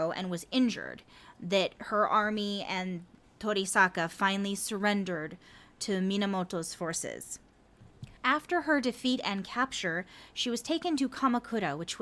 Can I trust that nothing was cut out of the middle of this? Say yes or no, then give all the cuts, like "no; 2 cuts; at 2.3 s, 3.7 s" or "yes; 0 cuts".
no; 1 cut; at 8.2 s